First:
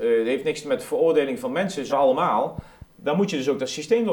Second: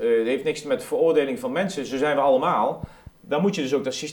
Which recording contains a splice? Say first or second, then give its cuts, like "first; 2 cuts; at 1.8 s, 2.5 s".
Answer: first; 1 cut; at 1.9 s